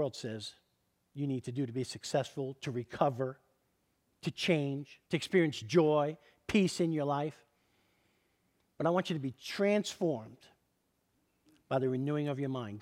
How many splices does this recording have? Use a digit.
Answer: 1